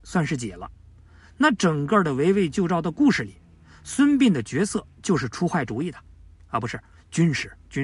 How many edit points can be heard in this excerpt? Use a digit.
0